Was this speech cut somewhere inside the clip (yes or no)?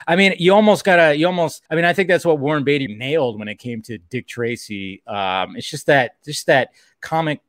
yes